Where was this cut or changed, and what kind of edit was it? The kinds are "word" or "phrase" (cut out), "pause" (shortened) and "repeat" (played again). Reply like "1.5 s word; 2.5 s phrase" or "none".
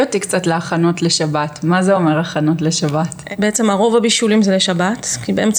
none